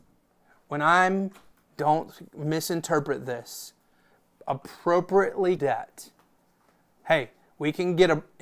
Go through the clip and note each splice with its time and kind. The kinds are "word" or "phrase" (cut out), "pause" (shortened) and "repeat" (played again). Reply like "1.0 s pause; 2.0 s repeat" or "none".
5.6 s phrase